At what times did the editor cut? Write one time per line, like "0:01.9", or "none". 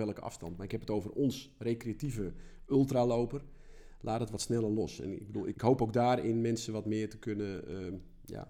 0:05.5